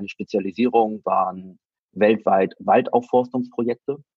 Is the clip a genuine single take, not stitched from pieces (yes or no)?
no